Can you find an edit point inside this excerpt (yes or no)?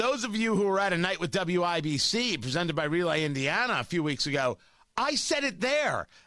no